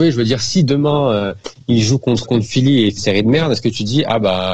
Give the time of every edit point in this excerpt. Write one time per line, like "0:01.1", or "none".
0:02.2
0:03.0